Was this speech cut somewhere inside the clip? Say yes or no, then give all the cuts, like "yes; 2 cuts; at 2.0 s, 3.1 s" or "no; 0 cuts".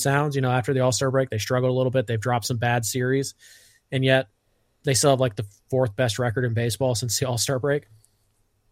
no; 0 cuts